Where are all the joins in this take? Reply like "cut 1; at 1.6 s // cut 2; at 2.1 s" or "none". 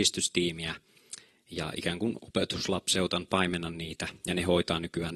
none

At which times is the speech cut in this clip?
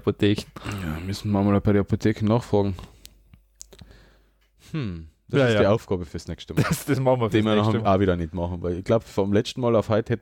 none

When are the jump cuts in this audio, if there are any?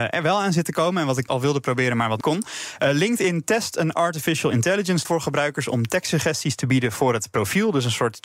cut 1; at 1.3 s // cut 2; at 2.2 s // cut 3; at 5.0 s

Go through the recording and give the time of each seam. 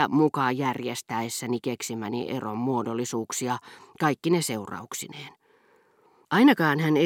none

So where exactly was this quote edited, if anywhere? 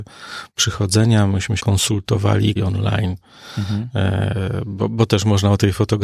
cut 1; at 1.6 s // cut 2; at 2.6 s

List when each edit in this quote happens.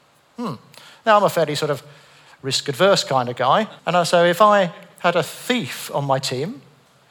cut 1; at 3.8 s

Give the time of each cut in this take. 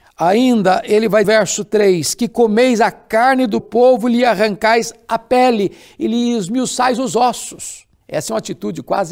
cut 1; at 1.2 s // cut 2; at 3.6 s // cut 3; at 8.0 s

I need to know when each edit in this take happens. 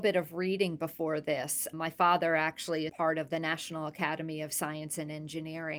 cut 1; at 2.9 s

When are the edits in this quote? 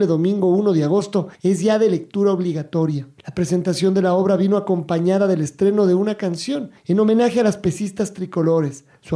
cut 1; at 1.4 s // cut 2; at 3.2 s // cut 3; at 6.8 s

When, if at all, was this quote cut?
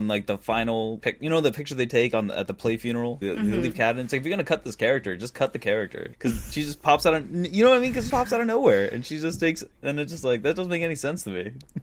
cut 1; at 1.0 s // cut 2; at 3.2 s // cut 3; at 6.1 s // cut 4; at 8.1 s

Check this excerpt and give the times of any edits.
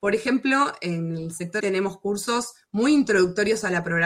cut 1; at 1.6 s

